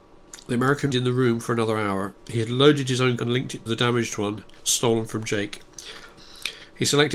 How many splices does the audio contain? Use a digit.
3